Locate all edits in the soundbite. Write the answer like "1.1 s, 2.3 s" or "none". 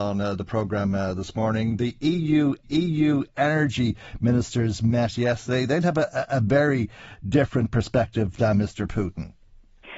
2.6 s